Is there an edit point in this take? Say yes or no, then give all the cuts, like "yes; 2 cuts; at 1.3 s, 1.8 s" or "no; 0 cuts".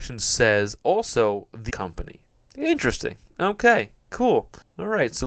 yes; 1 cut; at 1.7 s